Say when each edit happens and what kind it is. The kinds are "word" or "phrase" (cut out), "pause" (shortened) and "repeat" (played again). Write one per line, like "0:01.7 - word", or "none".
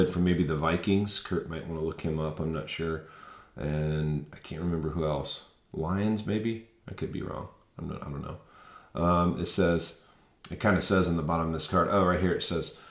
none